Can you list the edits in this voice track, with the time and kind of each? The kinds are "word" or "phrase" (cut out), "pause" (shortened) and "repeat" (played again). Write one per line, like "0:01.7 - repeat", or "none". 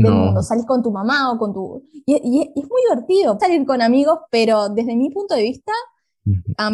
0:03.4 - word